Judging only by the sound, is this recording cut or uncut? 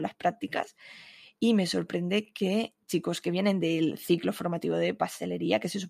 cut